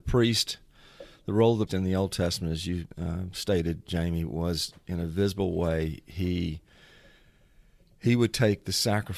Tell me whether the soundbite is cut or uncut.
cut